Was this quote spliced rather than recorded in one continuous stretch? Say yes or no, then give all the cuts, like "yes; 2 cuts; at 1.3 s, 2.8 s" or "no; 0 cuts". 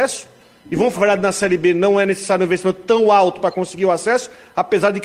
yes; 1 cut; at 0.9 s